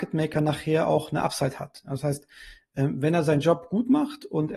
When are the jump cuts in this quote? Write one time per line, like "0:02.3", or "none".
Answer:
none